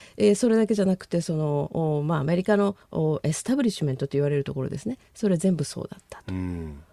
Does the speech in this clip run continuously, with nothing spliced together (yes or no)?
no